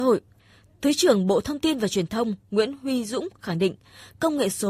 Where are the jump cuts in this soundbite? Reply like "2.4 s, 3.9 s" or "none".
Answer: none